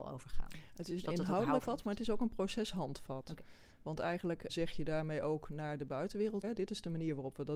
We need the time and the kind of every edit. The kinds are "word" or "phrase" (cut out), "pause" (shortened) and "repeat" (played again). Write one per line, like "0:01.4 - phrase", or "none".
0:01.7 - word
0:04.5 - word
0:06.4 - word